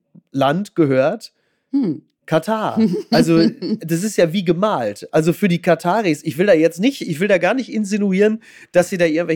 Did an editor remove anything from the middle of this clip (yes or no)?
no